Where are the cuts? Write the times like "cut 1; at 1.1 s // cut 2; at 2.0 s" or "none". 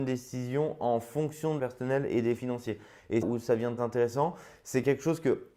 cut 1; at 1.6 s // cut 2; at 2.4 s // cut 3; at 3.2 s // cut 4; at 3.8 s